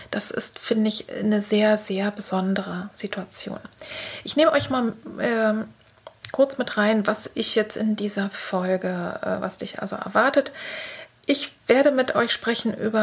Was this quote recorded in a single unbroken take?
no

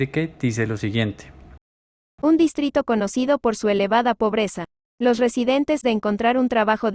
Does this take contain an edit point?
yes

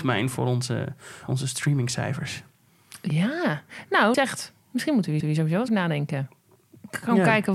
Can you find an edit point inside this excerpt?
yes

